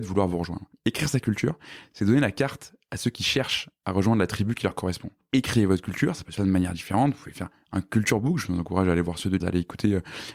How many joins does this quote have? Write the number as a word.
two